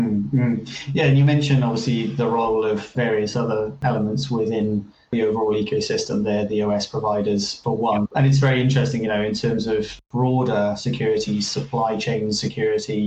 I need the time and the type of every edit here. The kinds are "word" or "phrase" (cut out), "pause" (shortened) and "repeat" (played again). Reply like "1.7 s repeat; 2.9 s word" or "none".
8.1 s pause